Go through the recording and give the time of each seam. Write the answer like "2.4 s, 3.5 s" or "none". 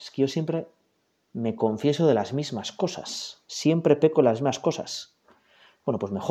none